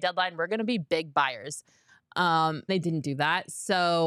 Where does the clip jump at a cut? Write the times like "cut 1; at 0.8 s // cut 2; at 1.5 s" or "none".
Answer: cut 1; at 2.7 s